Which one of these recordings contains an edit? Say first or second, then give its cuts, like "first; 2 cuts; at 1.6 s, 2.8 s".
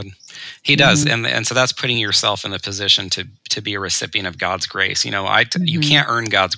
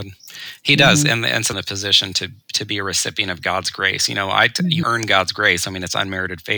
second; 2 cuts; at 1.5 s, 4.8 s